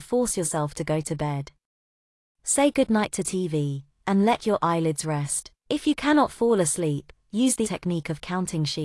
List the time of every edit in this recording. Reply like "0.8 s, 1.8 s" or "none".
5.6 s, 7.6 s